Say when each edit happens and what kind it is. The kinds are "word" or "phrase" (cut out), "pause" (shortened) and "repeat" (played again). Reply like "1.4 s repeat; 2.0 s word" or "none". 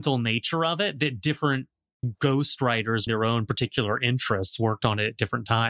3.1 s word